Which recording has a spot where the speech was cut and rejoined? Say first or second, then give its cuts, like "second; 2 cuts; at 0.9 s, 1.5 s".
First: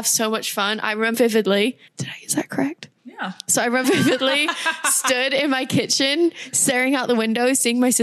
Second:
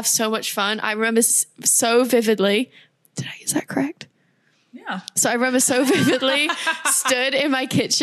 first; 4 cuts; at 1.1 s, 1.9 s, 3.0 s, 3.8 s